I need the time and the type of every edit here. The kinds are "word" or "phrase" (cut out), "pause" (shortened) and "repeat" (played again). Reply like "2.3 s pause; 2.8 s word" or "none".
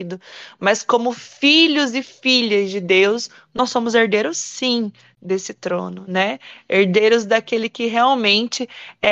none

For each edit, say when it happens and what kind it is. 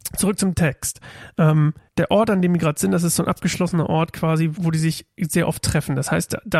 1.9 s pause; 4.6 s word

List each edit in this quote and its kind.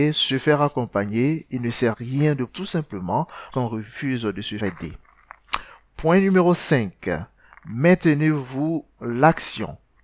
1.9 s word; 2.5 s word; 3.5 s word; 4.6 s word; 9.0 s word

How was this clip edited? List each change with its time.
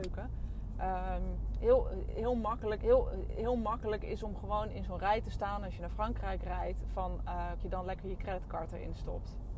2.8 s repeat; 7.6 s phrase

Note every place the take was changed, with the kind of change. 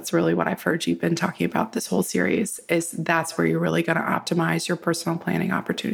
none

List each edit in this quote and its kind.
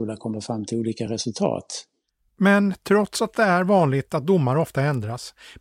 none

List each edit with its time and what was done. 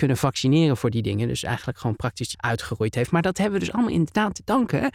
2.3 s word

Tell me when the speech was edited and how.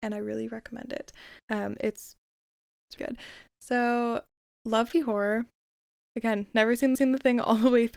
1.4 s pause; 3.0 s word; 4.9 s word; 6.9 s repeat

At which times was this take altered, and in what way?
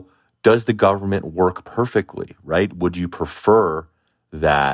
none

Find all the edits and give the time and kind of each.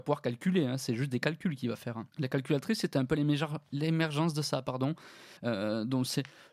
2.1 s pause; 5.4 s pause

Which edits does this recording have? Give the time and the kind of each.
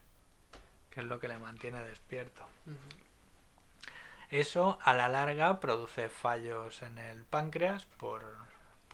2.6 s pause

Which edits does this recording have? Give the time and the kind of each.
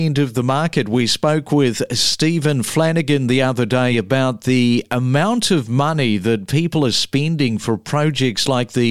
none

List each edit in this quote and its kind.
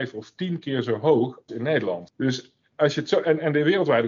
1.5 s word

